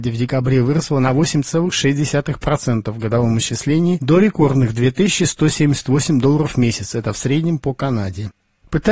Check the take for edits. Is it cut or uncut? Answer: uncut